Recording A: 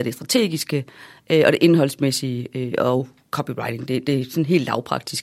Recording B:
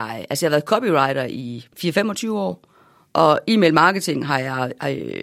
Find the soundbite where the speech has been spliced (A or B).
B